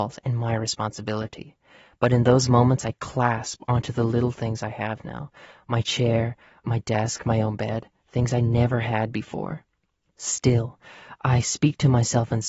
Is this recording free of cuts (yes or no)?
yes